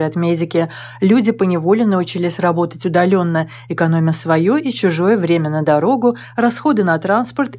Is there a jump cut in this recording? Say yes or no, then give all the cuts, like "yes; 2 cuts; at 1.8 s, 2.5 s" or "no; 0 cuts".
no; 0 cuts